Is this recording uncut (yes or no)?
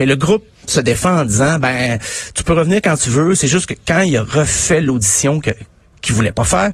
yes